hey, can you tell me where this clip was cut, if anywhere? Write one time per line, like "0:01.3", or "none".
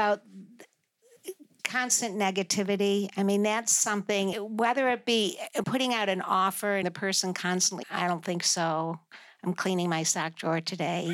0:04.3
0:05.6
0:06.8
0:07.8